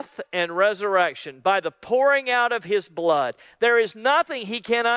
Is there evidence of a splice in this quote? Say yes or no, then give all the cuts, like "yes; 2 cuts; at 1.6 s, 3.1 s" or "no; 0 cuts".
no; 0 cuts